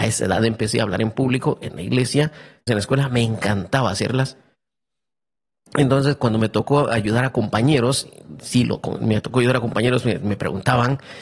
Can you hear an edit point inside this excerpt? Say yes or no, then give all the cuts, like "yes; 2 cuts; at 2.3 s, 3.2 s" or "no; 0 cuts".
yes; 1 cut; at 2.7 s